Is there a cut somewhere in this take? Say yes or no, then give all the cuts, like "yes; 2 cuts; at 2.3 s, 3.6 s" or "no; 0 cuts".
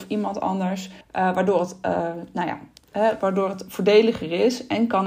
yes; 1 cut; at 1.0 s